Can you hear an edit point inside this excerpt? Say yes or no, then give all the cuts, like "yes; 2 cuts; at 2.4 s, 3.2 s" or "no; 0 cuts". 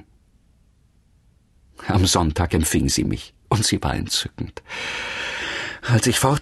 no; 0 cuts